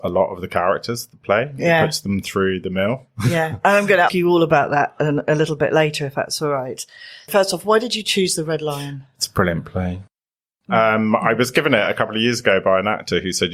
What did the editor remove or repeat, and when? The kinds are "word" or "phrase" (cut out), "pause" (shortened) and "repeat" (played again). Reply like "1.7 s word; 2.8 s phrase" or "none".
4.1 s word